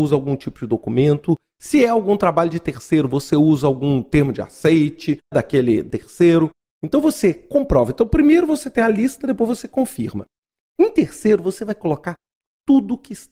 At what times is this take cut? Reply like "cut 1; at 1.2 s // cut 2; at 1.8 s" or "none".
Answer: cut 1; at 5.3 s